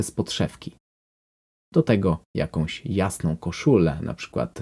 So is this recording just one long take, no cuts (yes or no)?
yes